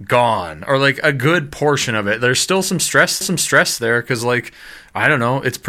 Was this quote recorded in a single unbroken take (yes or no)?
no